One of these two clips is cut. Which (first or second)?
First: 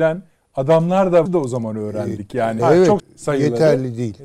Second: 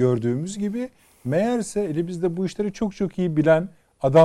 first